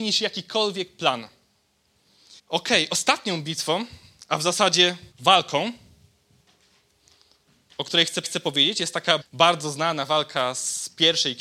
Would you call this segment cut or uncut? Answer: cut